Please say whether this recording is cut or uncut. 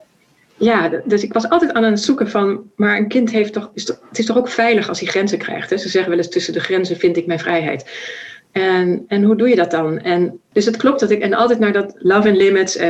cut